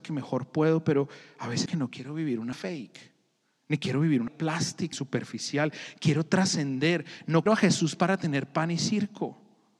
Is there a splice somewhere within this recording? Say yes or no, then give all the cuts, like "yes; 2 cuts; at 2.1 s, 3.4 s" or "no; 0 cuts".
yes; 5 cuts; at 1.7 s, 2.5 s, 4.3 s, 4.9 s, 7.5 s